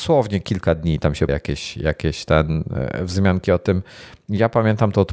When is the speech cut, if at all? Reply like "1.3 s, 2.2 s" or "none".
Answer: 1.3 s